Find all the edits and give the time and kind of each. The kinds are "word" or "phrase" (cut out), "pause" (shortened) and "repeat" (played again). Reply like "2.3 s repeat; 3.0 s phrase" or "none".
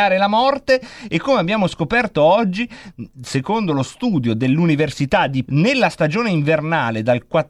5.4 s word